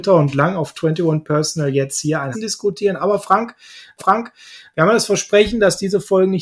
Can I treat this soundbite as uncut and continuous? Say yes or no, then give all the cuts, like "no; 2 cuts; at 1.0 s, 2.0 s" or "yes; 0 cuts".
no; 2 cuts; at 2.3 s, 4.0 s